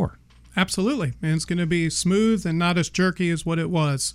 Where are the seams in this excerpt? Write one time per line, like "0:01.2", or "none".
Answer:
none